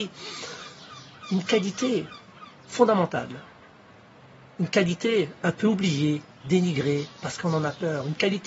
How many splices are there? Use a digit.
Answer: 1